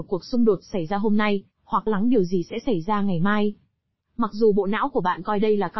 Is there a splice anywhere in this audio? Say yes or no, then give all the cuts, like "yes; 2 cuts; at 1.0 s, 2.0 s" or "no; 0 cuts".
yes; 1 cut; at 1.9 s